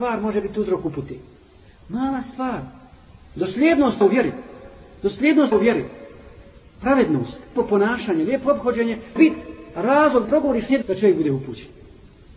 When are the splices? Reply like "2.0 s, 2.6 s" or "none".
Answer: 4.0 s, 5.5 s, 7.6 s, 9.2 s, 10.2 s, 10.8 s